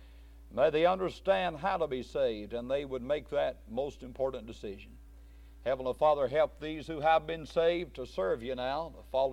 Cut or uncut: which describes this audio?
uncut